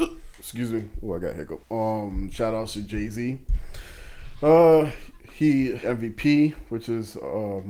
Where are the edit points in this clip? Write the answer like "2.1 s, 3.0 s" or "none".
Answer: 1.6 s, 5.8 s